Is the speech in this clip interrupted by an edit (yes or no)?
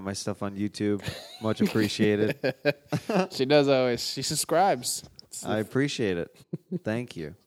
yes